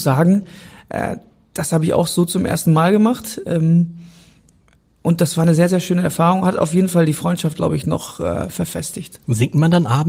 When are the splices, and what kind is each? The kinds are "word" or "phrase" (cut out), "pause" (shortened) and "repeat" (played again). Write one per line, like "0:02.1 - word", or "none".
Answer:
none